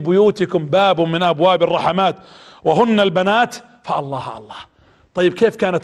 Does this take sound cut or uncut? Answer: uncut